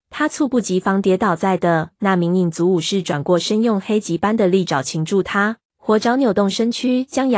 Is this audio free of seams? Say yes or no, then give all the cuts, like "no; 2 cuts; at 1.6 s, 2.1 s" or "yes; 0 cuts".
no; 2 cuts; at 2.0 s, 5.7 s